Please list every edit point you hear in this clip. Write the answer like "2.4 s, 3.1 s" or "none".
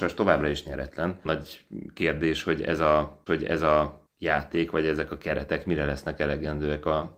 1.3 s, 3.3 s